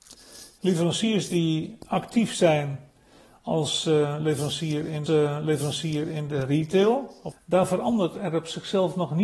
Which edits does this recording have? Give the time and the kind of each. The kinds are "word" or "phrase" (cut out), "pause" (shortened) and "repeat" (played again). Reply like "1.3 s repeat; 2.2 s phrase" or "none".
5.1 s repeat; 7.3 s phrase